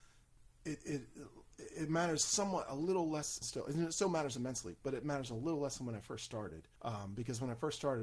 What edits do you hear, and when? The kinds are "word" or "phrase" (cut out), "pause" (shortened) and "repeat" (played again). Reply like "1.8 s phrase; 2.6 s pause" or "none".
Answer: 3.4 s word; 6.8 s pause